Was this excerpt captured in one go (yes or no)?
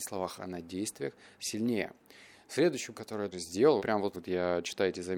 no